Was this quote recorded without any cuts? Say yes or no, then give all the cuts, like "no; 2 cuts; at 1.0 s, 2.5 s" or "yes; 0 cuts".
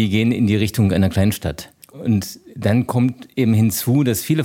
no; 1 cut; at 1.8 s